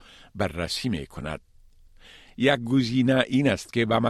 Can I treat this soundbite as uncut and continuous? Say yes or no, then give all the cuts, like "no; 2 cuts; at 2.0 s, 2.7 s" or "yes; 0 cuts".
yes; 0 cuts